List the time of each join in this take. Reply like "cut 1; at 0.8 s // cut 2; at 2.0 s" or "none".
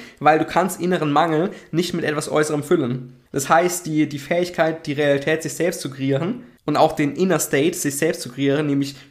cut 1; at 3.3 s // cut 2; at 6.6 s